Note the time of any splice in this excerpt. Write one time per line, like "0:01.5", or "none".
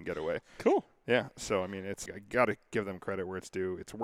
0:02.1